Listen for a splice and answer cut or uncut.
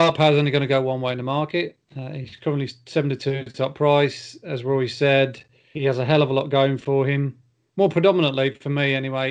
uncut